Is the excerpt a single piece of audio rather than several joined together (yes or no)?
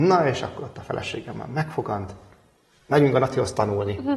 yes